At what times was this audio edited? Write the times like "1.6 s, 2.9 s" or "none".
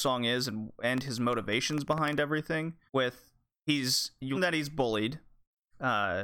2.9 s, 4.3 s